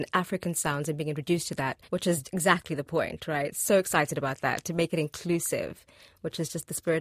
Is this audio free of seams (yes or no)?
no